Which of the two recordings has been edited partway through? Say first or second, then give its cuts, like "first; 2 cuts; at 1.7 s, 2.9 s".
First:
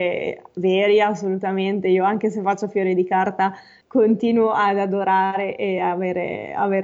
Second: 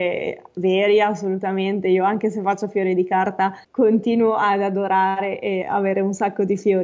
second; 2 cuts; at 3.6 s, 5.6 s